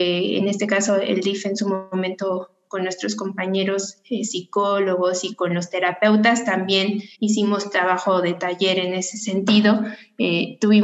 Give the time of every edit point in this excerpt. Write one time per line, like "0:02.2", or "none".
0:07.1